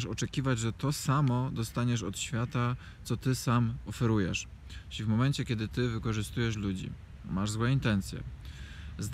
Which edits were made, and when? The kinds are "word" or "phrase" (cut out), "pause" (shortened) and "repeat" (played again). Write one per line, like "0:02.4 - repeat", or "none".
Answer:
none